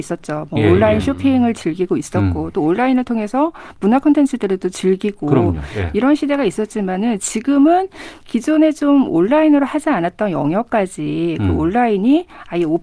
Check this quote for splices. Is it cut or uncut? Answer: uncut